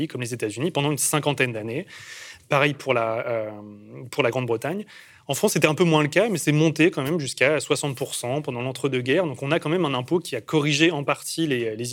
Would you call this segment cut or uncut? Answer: uncut